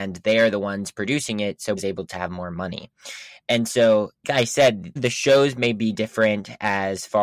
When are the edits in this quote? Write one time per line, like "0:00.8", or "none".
0:01.8
0:04.2
0:05.0

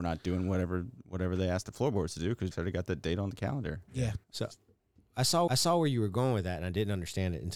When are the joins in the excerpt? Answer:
0:02.5
0:04.2
0:05.5

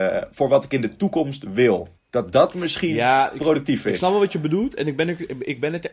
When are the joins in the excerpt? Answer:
0:02.0

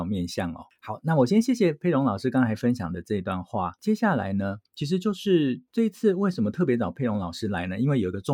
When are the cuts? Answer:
0:04.7

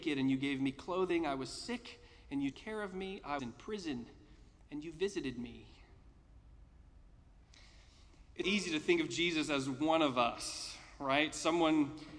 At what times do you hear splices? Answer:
0:02.5
0:03.4
0:08.4

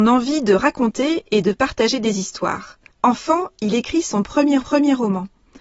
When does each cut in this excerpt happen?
0:02.9
0:04.6

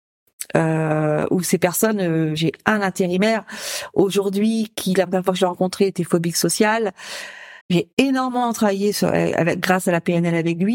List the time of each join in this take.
0:02.4
0:07.6
0:08.9

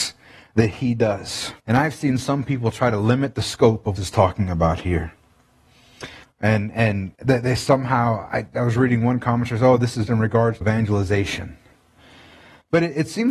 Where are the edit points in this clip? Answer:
0:01.6
0:04.0
0:06.2
0:07.1
0:10.1
0:10.6

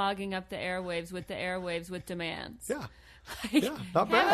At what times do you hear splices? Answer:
0:01.3

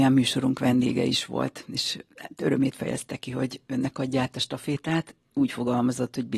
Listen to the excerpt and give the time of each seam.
none

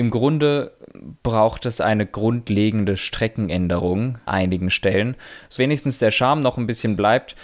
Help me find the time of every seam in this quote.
0:01.2
0:04.3
0:05.6

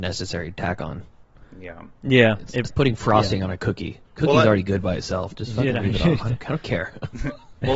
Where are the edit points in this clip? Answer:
0:02.7
0:04.0

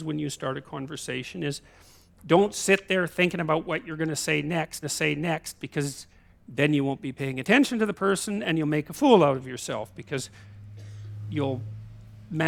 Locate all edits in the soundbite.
0:04.8

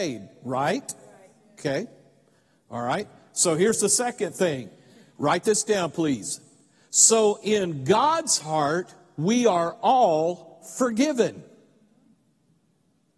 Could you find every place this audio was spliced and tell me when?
none

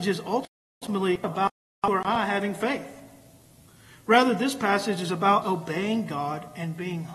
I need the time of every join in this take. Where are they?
0:05.4

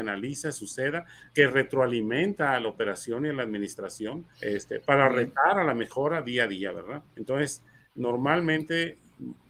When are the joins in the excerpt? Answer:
0:01.3
0:04.3
0:07.1

